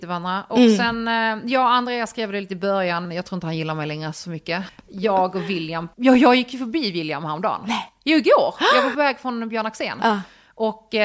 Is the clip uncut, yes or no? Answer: no